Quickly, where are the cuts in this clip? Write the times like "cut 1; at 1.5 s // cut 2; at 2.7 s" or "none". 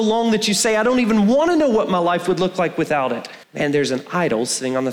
cut 1; at 3.4 s